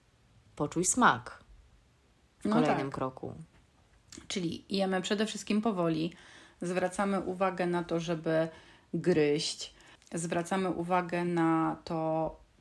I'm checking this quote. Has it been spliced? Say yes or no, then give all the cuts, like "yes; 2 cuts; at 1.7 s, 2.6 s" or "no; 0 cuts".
no; 0 cuts